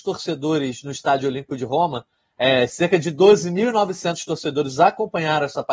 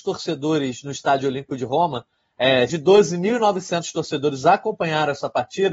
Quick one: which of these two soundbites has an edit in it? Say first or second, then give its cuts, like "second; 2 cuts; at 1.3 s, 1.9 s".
second; 1 cut; at 2.7 s